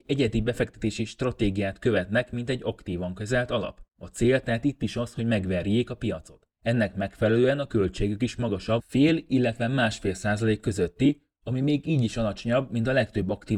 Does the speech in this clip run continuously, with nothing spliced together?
no; 2 cuts; at 3.9 s, 6.5 s

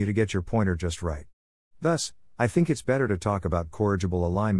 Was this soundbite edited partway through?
no; 0 cuts

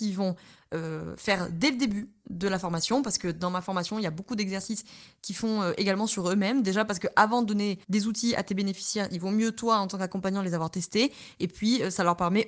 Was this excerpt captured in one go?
no; 1 cut; at 7.8 s

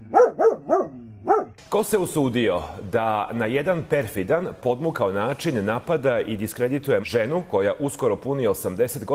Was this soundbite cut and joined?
yes; 1 cut; at 7.0 s

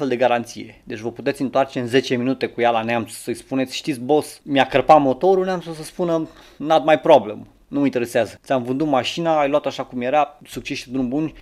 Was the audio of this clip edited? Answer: no; 0 cuts

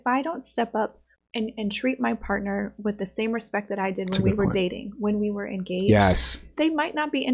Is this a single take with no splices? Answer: no; 1 cut; at 1.2 s

